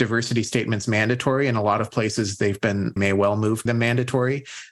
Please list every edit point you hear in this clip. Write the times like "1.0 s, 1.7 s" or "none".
3.0 s, 3.7 s

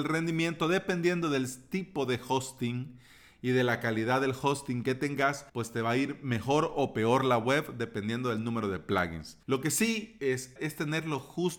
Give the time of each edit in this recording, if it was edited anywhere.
5.5 s, 9.4 s, 10.6 s

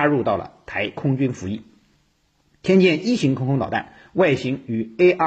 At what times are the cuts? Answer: none

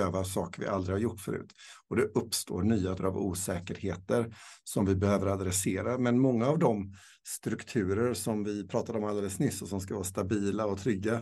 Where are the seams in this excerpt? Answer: 3.0 s

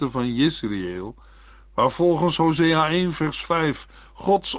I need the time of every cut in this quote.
none

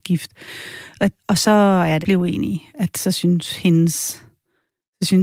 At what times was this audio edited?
1.2 s, 2.0 s

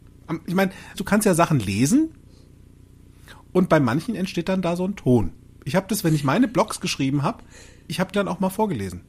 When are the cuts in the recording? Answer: 0.9 s, 8.1 s

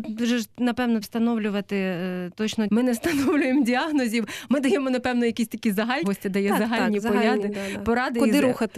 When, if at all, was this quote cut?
1.0 s, 2.7 s, 6.0 s

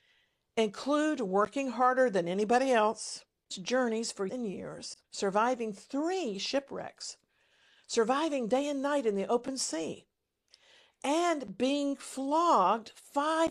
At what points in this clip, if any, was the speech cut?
3.5 s, 4.3 s, 5.0 s

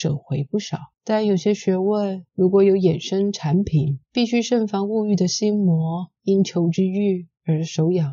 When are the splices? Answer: 0.9 s, 2.3 s, 4.0 s, 6.2 s

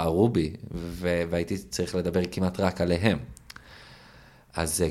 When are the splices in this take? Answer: none

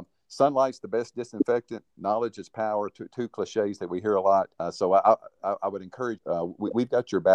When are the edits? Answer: 1.9 s, 4.5 s, 6.2 s

